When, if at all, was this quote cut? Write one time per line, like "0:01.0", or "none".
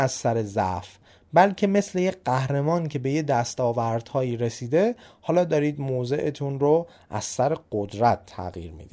none